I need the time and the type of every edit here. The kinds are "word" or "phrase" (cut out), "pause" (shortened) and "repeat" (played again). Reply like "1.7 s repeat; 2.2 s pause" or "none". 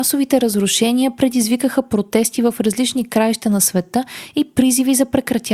none